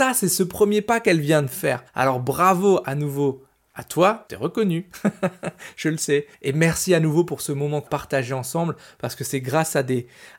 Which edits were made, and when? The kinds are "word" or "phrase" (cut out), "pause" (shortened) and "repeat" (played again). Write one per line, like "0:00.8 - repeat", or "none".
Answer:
0:01.9 - pause
0:04.3 - word
0:06.3 - pause
0:07.9 - word